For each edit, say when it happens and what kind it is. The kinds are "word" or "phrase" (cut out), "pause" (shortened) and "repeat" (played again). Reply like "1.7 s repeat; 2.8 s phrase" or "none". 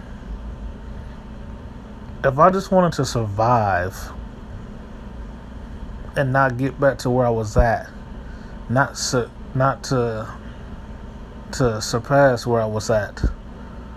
none